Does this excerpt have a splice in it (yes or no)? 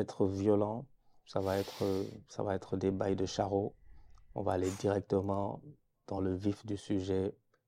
no